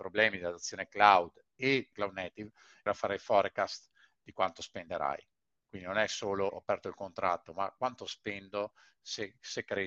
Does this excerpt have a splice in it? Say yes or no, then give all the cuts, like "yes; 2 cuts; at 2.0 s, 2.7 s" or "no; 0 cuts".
yes; 3 cuts; at 1.9 s, 2.9 s, 6.5 s